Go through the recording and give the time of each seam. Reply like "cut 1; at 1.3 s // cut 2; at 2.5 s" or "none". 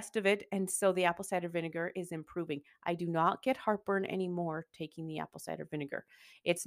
none